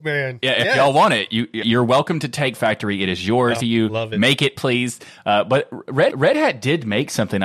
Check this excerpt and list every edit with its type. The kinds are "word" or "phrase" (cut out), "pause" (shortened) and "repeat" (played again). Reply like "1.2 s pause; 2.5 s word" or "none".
1.6 s word; 2.6 s word; 3.6 s phrase; 6.1 s repeat